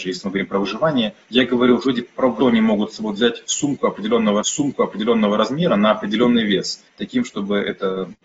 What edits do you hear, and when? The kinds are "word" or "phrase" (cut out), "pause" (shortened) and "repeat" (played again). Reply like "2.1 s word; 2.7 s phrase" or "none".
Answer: 1.2 s pause; 1.8 s word; 2.4 s phrase; 4.4 s repeat; 6.9 s pause